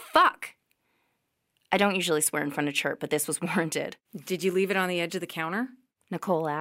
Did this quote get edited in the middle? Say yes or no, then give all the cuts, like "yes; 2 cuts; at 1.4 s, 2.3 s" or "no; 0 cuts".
yes; 1 cut; at 4.0 s